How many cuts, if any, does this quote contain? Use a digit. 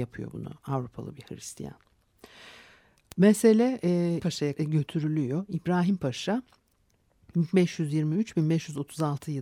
2